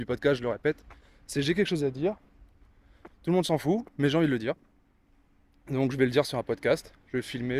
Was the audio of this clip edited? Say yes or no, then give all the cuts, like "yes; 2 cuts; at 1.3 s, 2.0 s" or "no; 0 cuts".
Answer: yes; 1 cut; at 3.1 s